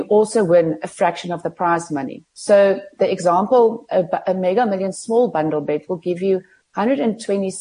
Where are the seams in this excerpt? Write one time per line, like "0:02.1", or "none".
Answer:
0:02.3